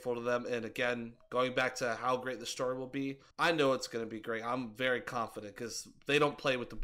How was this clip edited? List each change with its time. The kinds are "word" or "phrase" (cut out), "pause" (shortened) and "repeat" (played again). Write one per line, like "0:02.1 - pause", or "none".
0:03.3 - pause